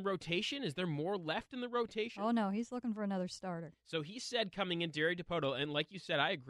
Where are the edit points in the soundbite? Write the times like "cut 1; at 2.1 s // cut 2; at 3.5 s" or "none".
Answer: none